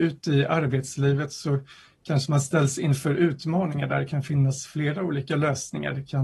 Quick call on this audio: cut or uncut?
uncut